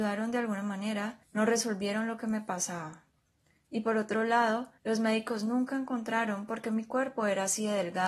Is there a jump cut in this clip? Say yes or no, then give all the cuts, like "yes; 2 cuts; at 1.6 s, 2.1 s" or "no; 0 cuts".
yes; 3 cuts; at 1.2 s, 3.4 s, 4.8 s